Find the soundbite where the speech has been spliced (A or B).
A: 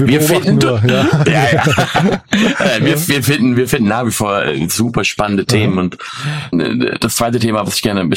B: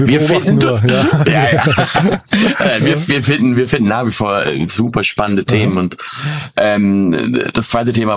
A